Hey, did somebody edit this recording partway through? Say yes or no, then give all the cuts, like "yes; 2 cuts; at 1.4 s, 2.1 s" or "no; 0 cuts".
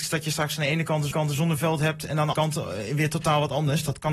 yes; 2 cuts; at 1.1 s, 2.3 s